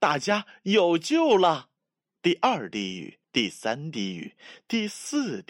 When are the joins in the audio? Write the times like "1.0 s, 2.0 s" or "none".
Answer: 1.8 s, 3.2 s